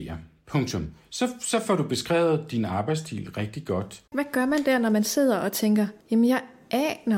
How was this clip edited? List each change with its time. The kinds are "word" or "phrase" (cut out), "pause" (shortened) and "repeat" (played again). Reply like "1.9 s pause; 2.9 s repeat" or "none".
4.1 s pause; 6.0 s pause